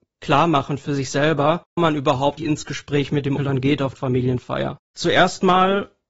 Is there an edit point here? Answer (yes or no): yes